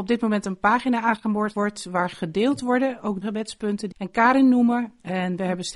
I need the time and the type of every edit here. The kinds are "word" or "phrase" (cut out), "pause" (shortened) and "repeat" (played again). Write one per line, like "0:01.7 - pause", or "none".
0:01.5 - word
0:02.1 - word
0:03.2 - word
0:03.9 - word